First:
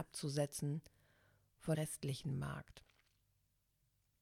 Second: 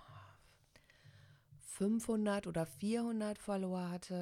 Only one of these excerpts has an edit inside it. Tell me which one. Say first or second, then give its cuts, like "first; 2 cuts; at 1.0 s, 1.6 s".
first; 1 cut; at 1.7 s